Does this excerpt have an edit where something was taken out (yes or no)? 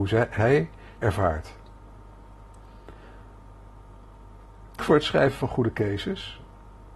yes